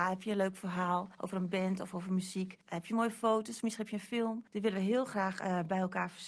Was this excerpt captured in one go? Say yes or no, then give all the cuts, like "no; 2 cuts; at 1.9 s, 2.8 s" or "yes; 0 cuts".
no; 3 cuts; at 1.1 s, 2.6 s, 4.5 s